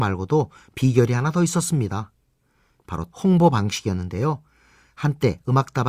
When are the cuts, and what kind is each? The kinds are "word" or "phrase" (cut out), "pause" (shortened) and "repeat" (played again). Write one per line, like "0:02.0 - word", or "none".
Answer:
0:03.1 - word